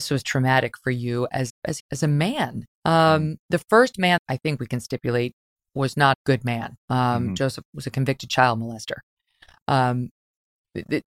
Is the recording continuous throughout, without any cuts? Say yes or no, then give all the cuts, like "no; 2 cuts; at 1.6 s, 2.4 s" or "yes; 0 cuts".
no; 8 cuts; at 1.5 s, 1.8 s, 2.7 s, 3.4 s, 4.2 s, 6.1 s, 6.8 s, 7.6 s